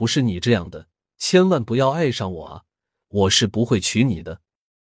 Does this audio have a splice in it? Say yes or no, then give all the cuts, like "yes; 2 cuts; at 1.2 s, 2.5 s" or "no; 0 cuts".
no; 0 cuts